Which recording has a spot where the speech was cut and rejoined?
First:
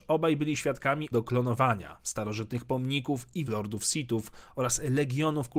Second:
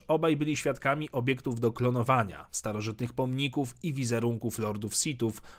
first; 2 cuts; at 1.1 s, 3.5 s

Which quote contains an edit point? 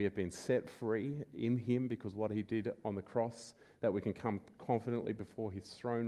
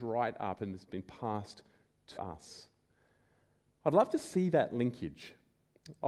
second; 1 cut; at 2.2 s

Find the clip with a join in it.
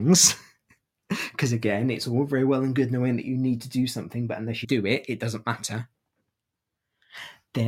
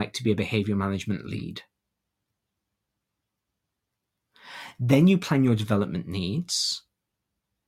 first; 1 cut; at 4.6 s

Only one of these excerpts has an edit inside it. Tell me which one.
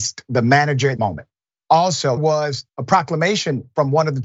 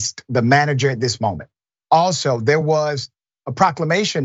first; 3 cuts; at 1.0 s, 2.2 s, 2.7 s

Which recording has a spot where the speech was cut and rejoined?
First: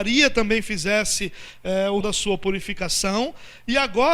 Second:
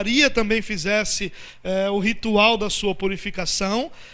first; 1 cut; at 2.0 s

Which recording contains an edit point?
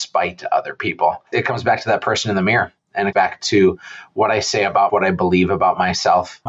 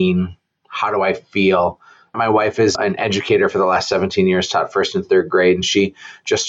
first; 3 cuts; at 1.3 s, 3.1 s, 4.9 s

